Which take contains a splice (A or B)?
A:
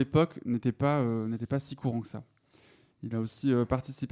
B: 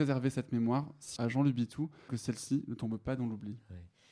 B